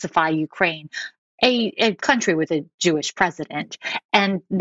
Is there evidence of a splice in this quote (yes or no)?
no